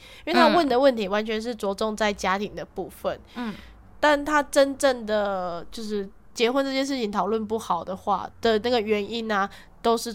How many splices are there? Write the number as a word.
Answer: one